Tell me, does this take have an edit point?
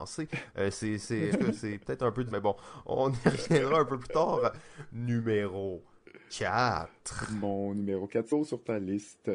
yes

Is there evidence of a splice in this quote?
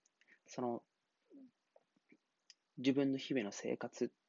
no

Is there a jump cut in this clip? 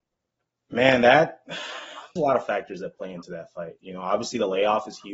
yes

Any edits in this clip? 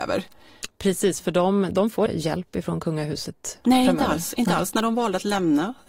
yes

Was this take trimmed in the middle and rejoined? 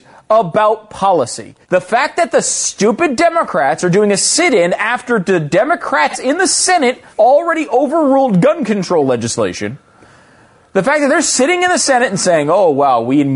yes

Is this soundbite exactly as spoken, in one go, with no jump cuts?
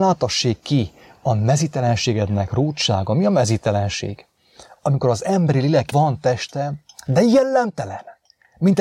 no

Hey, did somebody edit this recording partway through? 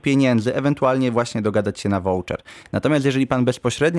no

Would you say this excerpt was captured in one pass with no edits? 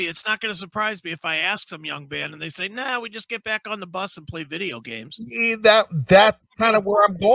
yes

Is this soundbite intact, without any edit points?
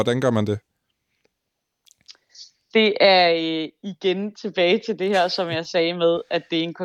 yes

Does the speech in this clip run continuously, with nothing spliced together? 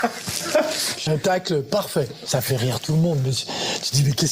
no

